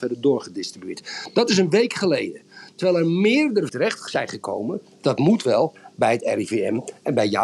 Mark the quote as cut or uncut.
cut